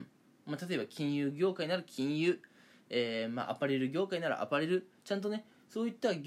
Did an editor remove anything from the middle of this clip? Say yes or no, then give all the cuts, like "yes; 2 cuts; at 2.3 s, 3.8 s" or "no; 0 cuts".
no; 0 cuts